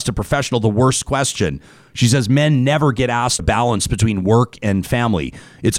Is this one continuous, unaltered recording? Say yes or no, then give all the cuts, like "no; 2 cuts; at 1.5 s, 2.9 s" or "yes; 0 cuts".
no; 1 cut; at 3.4 s